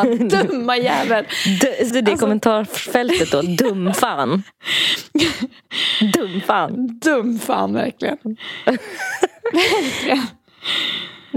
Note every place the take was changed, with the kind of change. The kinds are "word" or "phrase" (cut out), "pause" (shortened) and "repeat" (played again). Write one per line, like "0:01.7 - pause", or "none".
0:01.9 - word